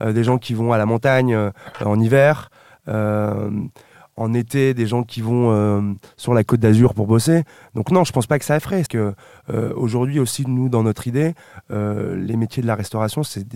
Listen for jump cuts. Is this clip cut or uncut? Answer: cut